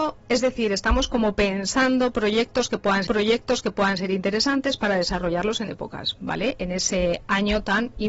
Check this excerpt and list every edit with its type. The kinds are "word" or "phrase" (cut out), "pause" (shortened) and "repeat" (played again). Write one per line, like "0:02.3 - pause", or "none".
0:03.1 - repeat
0:05.7 - word